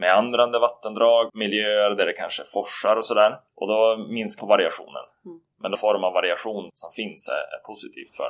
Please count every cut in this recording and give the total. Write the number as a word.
five